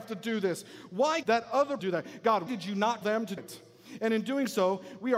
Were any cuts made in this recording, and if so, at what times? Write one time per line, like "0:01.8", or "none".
0:01.2
0:01.8
0:02.5
0:03.0
0:03.4